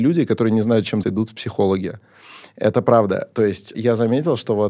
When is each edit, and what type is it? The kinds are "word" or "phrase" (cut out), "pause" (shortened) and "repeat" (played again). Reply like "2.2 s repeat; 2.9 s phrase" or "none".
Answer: 1.0 s word; 3.7 s word